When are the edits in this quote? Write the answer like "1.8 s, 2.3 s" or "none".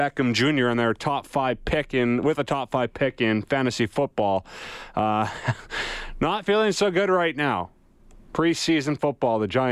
none